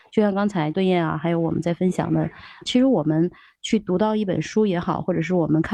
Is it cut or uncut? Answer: uncut